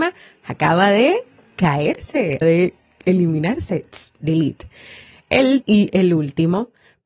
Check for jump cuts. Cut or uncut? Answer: cut